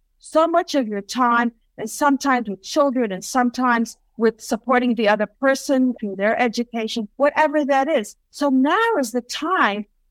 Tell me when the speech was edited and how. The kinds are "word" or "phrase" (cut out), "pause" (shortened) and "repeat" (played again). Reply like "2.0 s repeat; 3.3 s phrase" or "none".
4.1 s pause; 5.9 s word; 7.1 s pause; 8.2 s pause

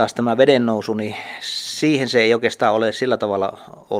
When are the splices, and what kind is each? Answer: none

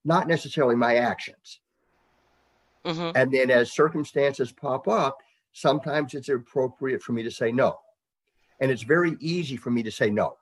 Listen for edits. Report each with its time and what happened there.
none

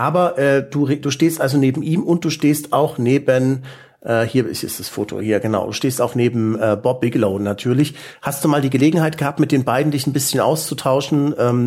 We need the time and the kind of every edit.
none

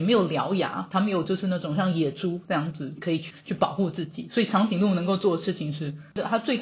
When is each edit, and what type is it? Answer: none

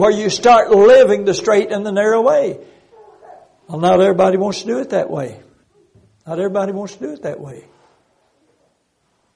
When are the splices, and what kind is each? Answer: 5.6 s pause

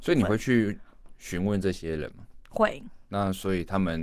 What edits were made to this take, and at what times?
3.0 s pause

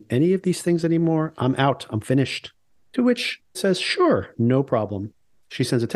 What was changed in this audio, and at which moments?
3.5 s word

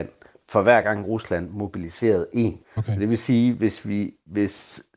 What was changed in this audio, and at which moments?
2.6 s pause

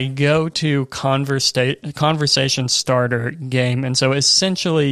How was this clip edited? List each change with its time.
none

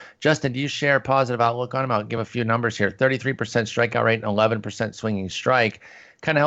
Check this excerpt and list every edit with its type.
none

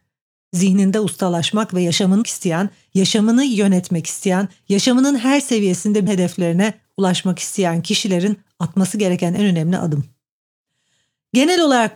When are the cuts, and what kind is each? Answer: 2.2 s word; 6.1 s word

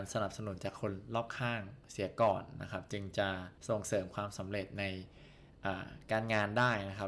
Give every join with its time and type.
3.6 s pause

